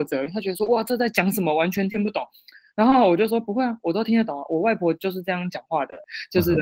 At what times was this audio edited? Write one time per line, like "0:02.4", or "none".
none